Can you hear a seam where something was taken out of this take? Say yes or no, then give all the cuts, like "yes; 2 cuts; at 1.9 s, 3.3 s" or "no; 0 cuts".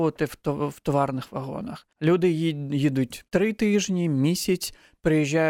yes; 2 cuts; at 1.9 s, 3.3 s